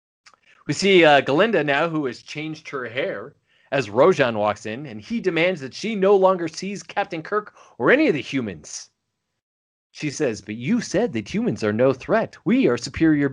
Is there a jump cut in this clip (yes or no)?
no